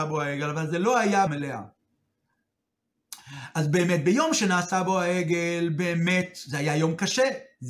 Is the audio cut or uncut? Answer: cut